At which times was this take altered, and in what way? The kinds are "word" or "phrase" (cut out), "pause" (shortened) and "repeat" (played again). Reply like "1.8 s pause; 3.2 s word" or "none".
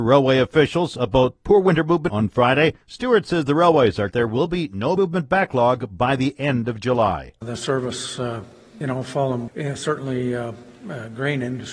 2.1 s phrase; 2.8 s pause; 4.1 s word; 5.0 s word; 8.8 s phrase; 9.5 s word